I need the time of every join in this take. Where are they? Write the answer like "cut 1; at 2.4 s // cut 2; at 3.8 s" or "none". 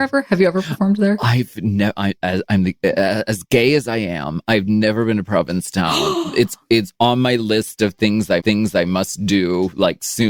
cut 1; at 8.4 s

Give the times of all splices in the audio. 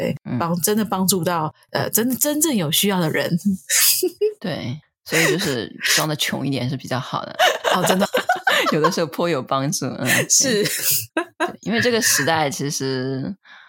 cut 1; at 7.4 s // cut 2; at 8.1 s // cut 3; at 11.1 s

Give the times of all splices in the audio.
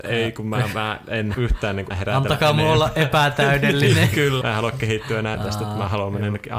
cut 1; at 1.3 s // cut 2; at 1.9 s // cut 3; at 4.4 s // cut 4; at 5.3 s

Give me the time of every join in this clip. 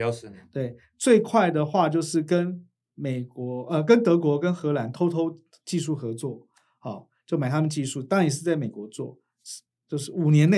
none

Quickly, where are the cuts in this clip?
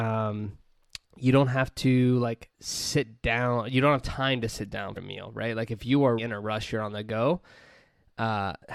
cut 1; at 1.0 s // cut 2; at 2.5 s // cut 3; at 5.0 s // cut 4; at 6.2 s

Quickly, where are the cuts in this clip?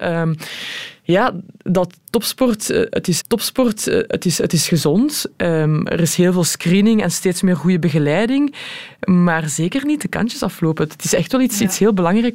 cut 1; at 3.2 s

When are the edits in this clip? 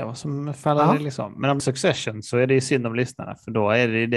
cut 1; at 1.6 s

